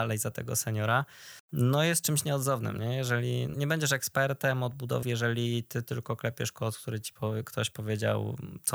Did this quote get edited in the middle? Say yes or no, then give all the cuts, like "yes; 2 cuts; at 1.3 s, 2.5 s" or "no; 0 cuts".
yes; 2 cuts; at 3.5 s, 5.0 s